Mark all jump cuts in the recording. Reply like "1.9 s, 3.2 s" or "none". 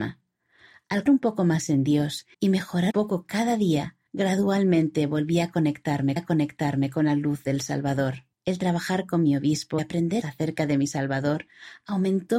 1.1 s, 2.3 s, 2.9 s, 4.1 s, 6.2 s, 8.3 s, 9.8 s, 10.2 s